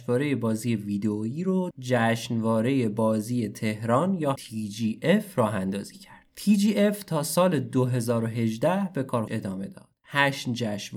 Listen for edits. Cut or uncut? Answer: cut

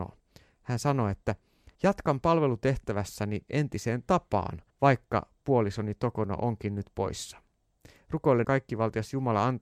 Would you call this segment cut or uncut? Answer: cut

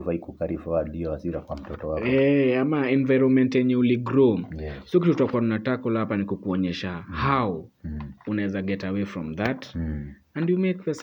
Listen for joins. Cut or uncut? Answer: cut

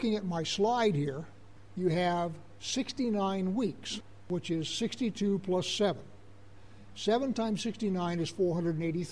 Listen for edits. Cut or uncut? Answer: uncut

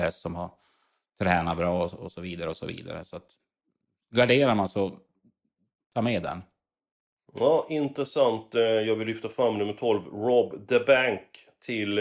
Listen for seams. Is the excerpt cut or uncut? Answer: uncut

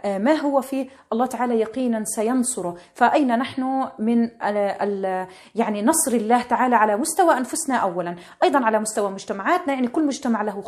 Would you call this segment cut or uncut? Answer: uncut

